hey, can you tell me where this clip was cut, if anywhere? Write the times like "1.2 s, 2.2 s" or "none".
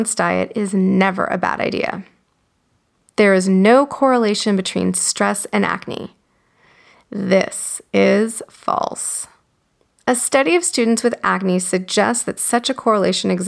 none